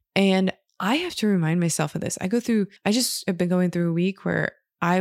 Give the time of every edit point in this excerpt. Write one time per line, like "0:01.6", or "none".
0:02.8

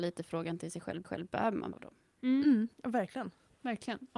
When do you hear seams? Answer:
0:01.0
0:01.7
0:02.7

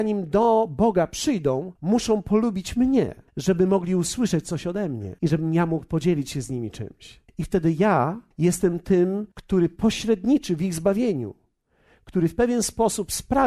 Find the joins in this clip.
0:01.8
0:03.3
0:05.2
0:07.3
0:08.3
0:09.3

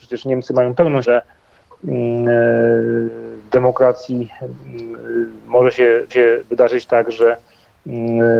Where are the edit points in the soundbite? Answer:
0:01.0
0:06.1

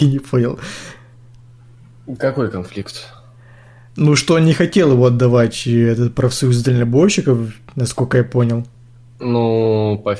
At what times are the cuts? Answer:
none

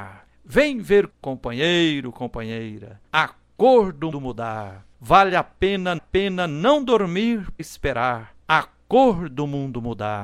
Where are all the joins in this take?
0:01.1
0:03.1
0:04.1
0:04.9
0:06.0
0:07.6
0:08.4

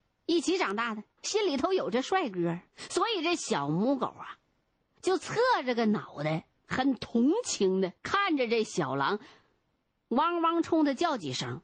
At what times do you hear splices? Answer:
0:01.1
0:02.7
0:06.6
0:08.0

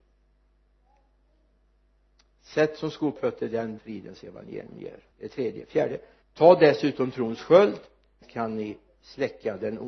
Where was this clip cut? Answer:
0:03.2
0:03.8
0:05.1
0:06.2
0:08.2

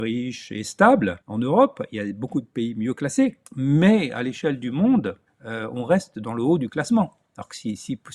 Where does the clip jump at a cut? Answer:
0:01.2
0:03.5
0:05.3

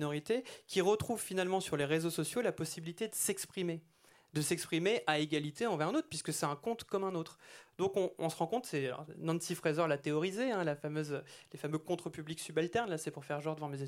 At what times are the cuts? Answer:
none

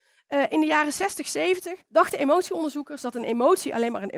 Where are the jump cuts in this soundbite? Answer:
0:01.9

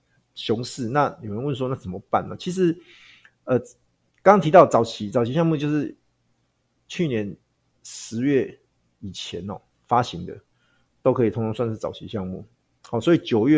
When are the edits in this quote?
none

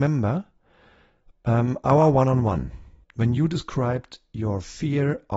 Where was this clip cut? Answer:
0:03.0

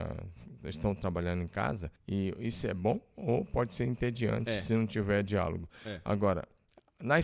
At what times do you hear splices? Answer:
0:02.0

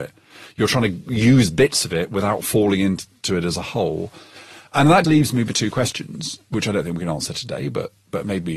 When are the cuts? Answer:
0:05.0

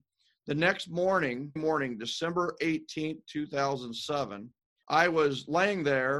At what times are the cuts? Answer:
0:01.6
0:04.8

